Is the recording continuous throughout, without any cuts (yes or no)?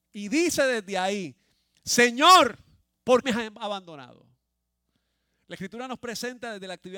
no